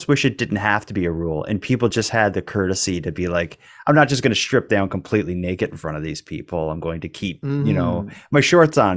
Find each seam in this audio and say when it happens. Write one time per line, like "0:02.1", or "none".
none